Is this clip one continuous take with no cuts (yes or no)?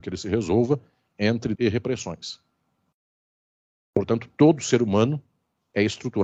no